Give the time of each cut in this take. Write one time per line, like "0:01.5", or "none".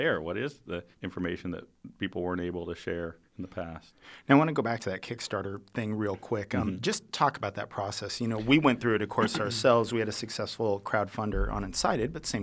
0:00.9
0:03.3
0:07.1